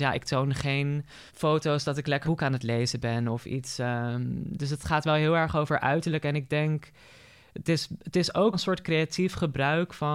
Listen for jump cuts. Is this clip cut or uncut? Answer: cut